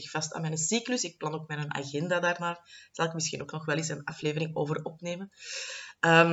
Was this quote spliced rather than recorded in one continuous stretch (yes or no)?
no